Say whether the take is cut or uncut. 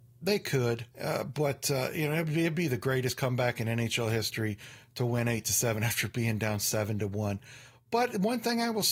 cut